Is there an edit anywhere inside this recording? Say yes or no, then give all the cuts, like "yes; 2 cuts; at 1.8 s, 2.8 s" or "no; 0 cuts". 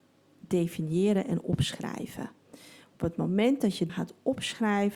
yes; 1 cut; at 3.9 s